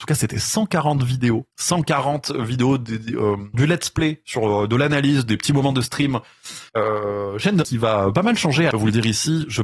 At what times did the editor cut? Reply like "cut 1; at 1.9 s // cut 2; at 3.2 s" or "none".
cut 1; at 1.5 s // cut 2; at 3.5 s // cut 3; at 6.7 s // cut 4; at 7.6 s // cut 5; at 8.7 s